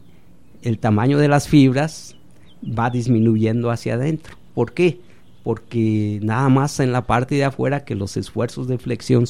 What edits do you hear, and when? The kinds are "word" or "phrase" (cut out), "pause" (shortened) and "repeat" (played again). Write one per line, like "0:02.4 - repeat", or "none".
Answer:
none